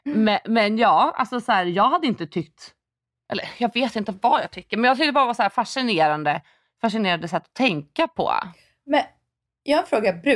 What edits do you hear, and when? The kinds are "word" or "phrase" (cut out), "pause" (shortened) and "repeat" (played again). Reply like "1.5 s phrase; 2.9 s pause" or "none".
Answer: none